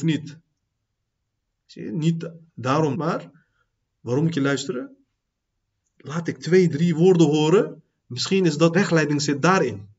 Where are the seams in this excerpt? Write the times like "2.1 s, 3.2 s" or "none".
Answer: 2.9 s, 6.7 s, 8.7 s